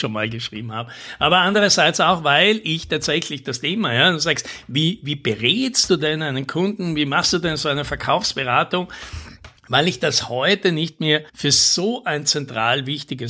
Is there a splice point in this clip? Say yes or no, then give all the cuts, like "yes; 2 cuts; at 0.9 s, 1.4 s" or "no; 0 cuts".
yes; 2 cuts; at 9.6 s, 11.3 s